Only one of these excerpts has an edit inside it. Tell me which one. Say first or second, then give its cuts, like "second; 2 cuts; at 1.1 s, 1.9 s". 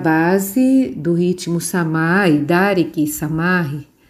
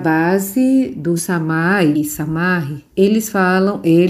second; 3 cuts; at 1.2 s, 1.9 s, 2.9 s